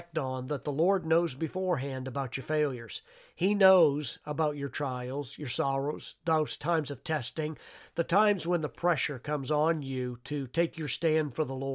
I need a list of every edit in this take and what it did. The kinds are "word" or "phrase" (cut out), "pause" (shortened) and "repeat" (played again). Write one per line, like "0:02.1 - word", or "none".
none